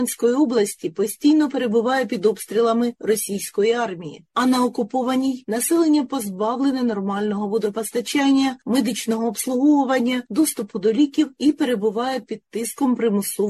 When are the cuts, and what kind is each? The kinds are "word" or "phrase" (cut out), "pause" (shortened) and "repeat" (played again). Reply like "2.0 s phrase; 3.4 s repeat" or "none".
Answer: none